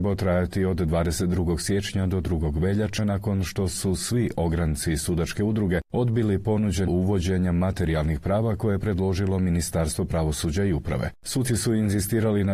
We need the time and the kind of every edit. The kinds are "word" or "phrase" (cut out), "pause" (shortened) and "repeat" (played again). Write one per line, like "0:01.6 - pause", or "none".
0:03.0 - word
0:06.9 - word

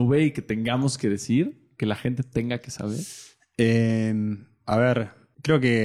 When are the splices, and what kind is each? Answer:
none

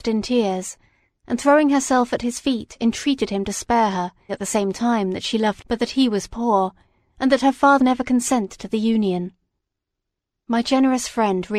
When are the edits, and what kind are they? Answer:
0:04.3 - word
0:05.6 - word
0:07.8 - word

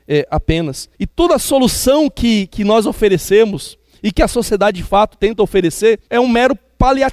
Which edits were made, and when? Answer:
0:00.9 - pause
0:06.1 - pause

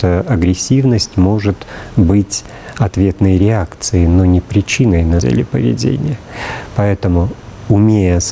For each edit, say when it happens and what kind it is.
0:05.2 - word

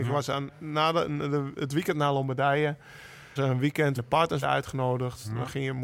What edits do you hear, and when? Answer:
0:03.4 - word
0:04.0 - word
0:04.4 - word

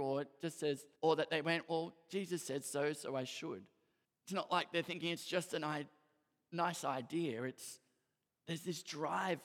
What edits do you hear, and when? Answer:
0:01.0 - pause
0:04.0 - pause

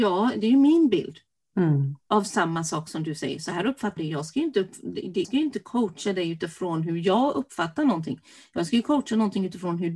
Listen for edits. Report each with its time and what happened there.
0:04.0 - word
0:05.2 - word

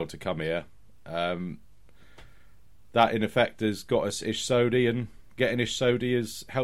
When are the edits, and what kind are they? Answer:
none

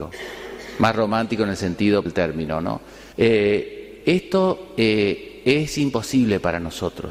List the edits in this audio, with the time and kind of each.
0:02.1 - word
0:03.1 - pause

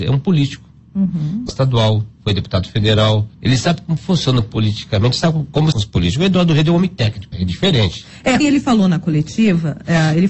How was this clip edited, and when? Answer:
0:01.5 - word
0:03.3 - pause
0:05.7 - phrase
0:07.3 - word
0:08.4 - word

